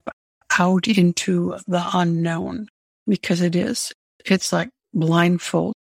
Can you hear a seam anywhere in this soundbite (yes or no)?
no